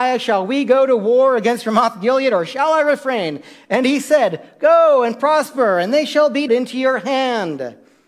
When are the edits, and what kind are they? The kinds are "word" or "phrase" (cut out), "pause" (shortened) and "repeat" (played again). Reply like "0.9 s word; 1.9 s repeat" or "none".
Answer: 6.5 s word